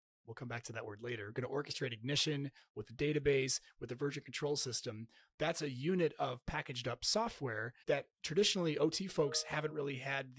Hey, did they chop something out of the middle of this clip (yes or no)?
yes